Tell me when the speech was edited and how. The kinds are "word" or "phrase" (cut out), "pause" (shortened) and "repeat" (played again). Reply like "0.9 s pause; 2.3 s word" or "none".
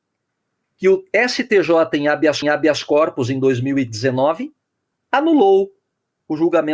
2.4 s repeat